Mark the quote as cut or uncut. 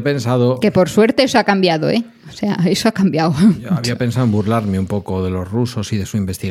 uncut